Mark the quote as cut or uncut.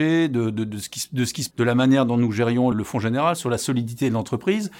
cut